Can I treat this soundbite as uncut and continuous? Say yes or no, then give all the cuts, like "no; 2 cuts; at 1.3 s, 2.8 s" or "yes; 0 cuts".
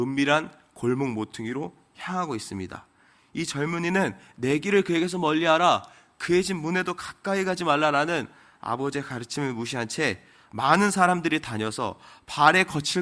yes; 0 cuts